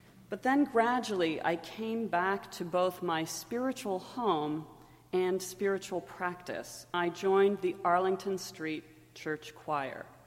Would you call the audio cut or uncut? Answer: cut